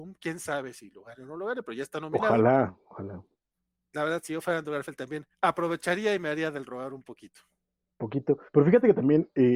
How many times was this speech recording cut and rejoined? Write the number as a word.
two